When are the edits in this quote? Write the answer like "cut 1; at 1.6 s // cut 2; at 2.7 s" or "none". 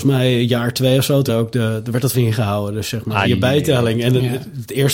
cut 1; at 1.3 s // cut 2; at 2.1 s // cut 3; at 3.2 s

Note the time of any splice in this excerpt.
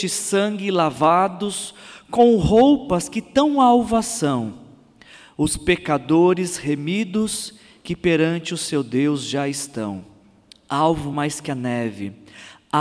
none

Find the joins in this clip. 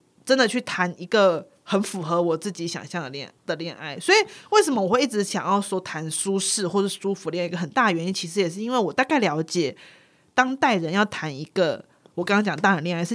cut 1; at 3.4 s

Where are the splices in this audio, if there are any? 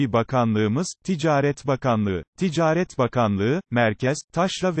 cut 1; at 2.3 s

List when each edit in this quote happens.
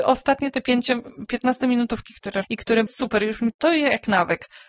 cut 1; at 2.4 s // cut 2; at 2.9 s // cut 3; at 3.5 s

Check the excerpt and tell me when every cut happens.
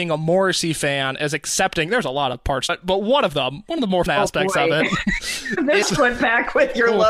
cut 1; at 2.7 s // cut 2; at 4.1 s // cut 3; at 5.8 s

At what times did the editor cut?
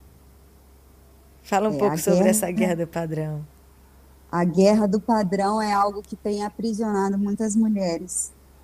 none

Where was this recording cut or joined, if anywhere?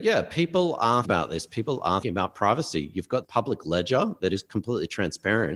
cut 1; at 1.0 s // cut 2; at 2.0 s // cut 3; at 3.2 s

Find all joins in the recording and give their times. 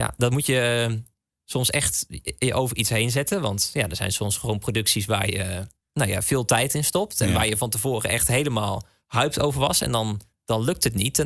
none

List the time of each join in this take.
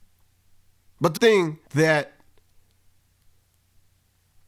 cut 1; at 1.2 s // cut 2; at 1.7 s

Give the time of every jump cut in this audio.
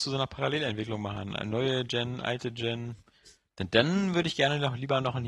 none

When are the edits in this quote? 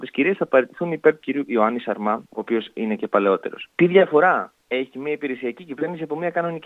cut 1; at 1.2 s // cut 2; at 2.3 s // cut 3; at 3.7 s // cut 4; at 4.6 s

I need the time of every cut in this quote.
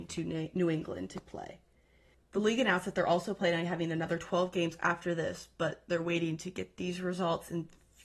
none

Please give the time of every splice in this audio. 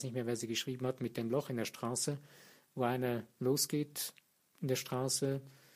none

